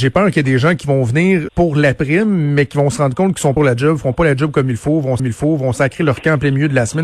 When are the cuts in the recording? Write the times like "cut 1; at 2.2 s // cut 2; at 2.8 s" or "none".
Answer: cut 1; at 1.5 s // cut 2; at 3.6 s // cut 3; at 5.2 s